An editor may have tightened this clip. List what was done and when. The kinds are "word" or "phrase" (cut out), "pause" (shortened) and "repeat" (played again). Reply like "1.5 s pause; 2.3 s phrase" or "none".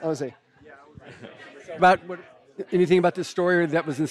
1.8 s word